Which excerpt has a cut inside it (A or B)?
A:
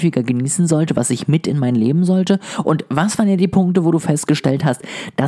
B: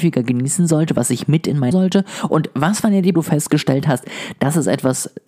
B